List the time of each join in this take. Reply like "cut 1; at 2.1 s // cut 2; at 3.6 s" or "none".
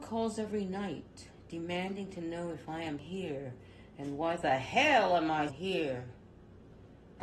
cut 1; at 3.0 s // cut 2; at 5.5 s